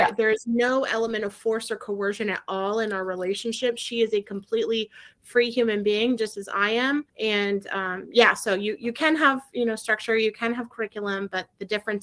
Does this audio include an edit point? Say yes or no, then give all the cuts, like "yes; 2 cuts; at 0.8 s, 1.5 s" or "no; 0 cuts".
yes; 1 cut; at 7.1 s